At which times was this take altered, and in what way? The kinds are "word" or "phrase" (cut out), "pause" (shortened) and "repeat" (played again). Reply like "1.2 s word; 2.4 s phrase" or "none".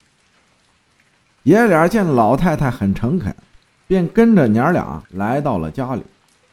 3.5 s pause; 5.0 s pause